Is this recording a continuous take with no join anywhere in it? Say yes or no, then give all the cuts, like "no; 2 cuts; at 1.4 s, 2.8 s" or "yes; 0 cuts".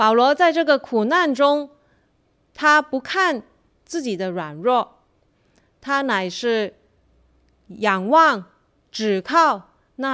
yes; 0 cuts